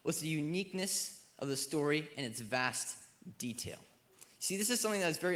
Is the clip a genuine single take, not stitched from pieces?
yes; 0 cuts

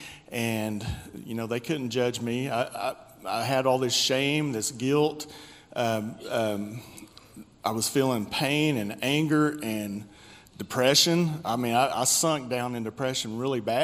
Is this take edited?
no; 0 cuts

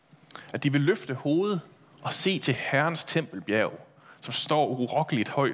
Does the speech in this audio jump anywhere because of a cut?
no; 0 cuts

